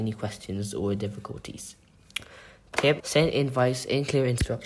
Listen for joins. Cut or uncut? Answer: cut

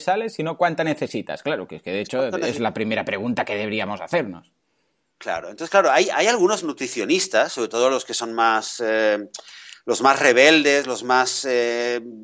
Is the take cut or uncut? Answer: uncut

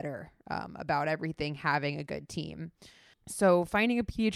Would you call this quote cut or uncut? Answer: uncut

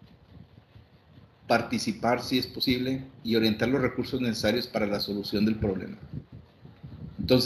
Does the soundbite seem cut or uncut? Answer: uncut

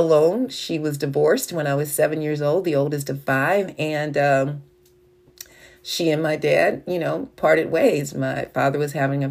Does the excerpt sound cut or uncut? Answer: uncut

